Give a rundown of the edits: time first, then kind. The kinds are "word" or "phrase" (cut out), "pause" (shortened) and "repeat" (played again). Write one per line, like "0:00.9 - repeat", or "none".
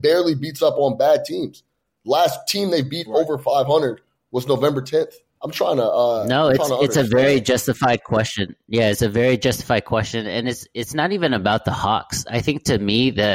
none